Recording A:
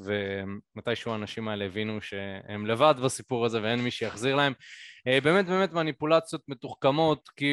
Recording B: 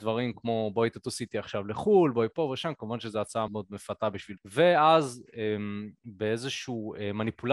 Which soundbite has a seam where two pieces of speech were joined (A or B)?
B